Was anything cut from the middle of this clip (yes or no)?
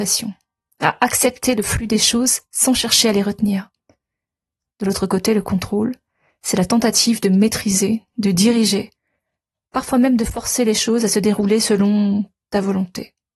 no